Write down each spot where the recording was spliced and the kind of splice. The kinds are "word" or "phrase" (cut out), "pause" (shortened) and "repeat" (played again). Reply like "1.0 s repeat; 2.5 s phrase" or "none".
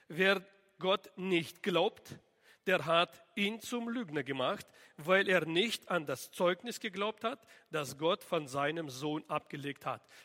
none